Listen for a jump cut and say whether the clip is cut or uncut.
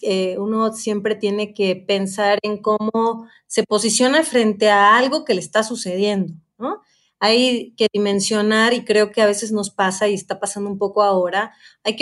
uncut